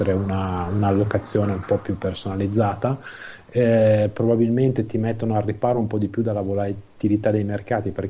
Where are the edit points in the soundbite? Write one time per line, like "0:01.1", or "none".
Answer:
none